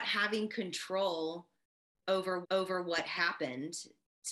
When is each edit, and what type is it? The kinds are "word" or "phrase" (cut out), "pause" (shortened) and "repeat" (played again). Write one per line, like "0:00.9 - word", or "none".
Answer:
0:02.4 - repeat